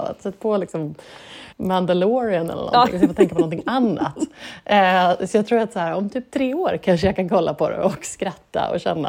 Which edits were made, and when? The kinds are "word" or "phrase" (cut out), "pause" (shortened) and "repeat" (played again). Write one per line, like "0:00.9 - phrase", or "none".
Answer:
0:01.5 - pause